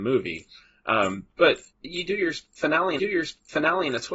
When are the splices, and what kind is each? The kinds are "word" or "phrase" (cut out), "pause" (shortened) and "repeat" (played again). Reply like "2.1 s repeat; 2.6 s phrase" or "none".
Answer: 1.7 s pause; 3.0 s repeat